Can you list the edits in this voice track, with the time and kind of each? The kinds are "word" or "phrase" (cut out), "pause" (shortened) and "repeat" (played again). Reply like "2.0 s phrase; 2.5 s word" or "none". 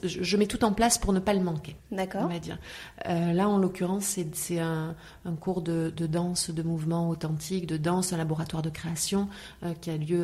1.8 s pause